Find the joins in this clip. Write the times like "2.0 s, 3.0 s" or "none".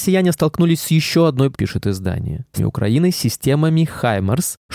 1.5 s, 2.6 s